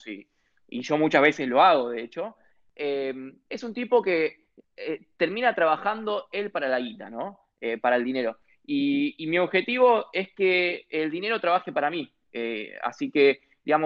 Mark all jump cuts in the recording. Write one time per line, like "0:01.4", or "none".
none

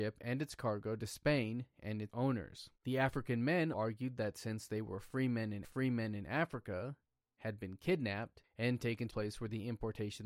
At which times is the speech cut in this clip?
0:02.1
0:02.8
0:03.7
0:05.6
0:09.1

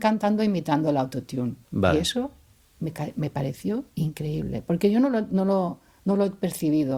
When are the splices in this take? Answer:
0:01.6

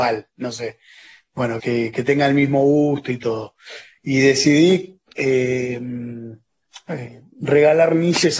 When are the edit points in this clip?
0:01.6

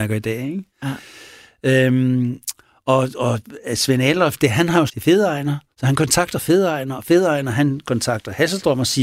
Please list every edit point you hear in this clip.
0:04.9
0:05.7

